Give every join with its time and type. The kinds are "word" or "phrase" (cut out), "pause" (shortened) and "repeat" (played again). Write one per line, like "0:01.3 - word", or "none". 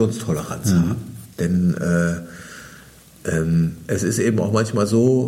0:01.3 - pause